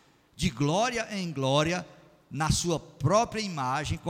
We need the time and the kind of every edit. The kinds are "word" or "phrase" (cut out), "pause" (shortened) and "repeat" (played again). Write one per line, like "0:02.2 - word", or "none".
none